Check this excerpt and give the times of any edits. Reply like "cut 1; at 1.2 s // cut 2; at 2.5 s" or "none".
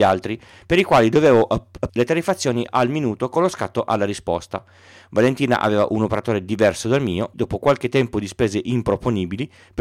cut 1; at 1.9 s // cut 2; at 2.7 s // cut 3; at 7.3 s